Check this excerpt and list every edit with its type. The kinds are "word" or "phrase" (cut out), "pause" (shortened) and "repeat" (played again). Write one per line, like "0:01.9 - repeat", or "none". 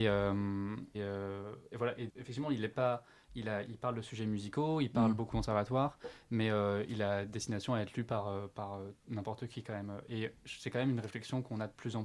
0:00.9 - word
0:02.1 - word
0:05.3 - word